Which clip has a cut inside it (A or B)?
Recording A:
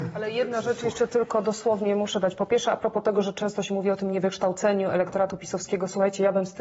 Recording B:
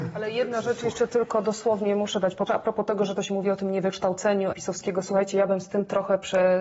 B